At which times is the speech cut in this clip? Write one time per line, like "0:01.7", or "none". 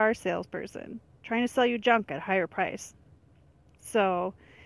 none